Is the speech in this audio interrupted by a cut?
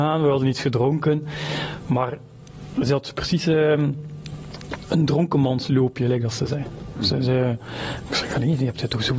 no; 0 cuts

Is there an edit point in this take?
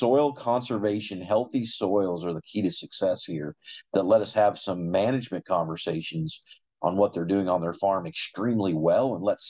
no; 0 cuts

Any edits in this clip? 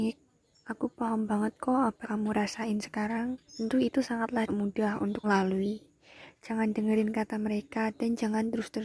yes; 4 cuts; at 2.0 s, 3.5 s, 4.5 s, 5.2 s

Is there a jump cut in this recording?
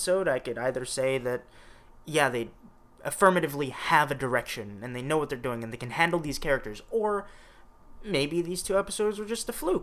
no; 0 cuts

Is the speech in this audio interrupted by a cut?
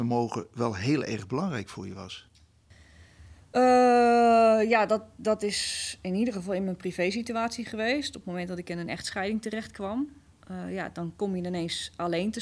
no; 0 cuts

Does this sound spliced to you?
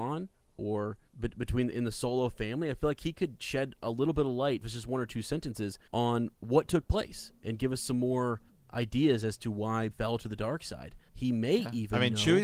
yes; 7 cuts; at 1.1 s, 1.7 s, 4.6 s, 5.9 s, 8.5 s, 9.9 s, 11.1 s

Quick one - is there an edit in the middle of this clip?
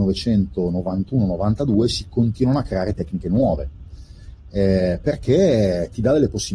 no; 0 cuts

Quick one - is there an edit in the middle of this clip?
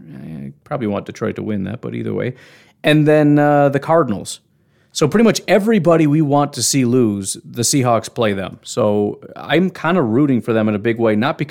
no; 0 cuts

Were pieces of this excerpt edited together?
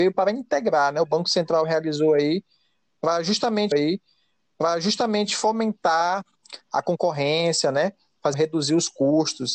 yes; 2 cuts; at 3.7 s, 8.3 s

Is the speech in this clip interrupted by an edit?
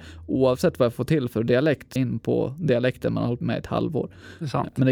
yes; 3 cuts; at 0.9 s, 2.0 s, 3.4 s

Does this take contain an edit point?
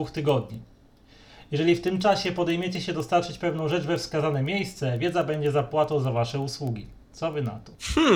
yes; 1 cut; at 7.0 s

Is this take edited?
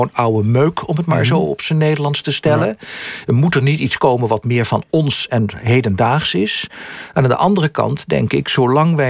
no; 0 cuts

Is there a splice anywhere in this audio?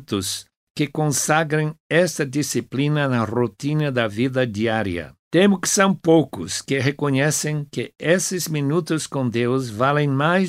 yes; 1 cut; at 5.2 s

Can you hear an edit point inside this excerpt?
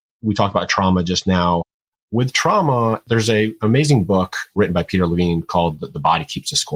no; 0 cuts

